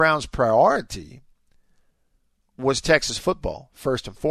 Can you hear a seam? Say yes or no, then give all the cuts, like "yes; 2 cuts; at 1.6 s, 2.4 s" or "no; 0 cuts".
no; 0 cuts